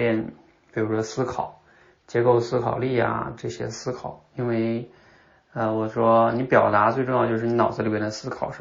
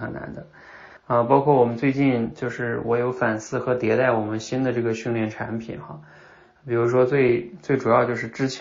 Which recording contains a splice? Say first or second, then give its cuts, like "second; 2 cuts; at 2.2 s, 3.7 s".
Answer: second; 1 cut; at 1.0 s